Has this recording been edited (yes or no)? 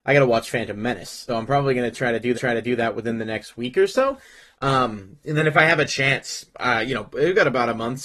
yes